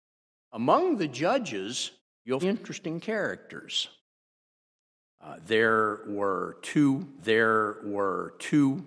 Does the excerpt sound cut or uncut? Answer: cut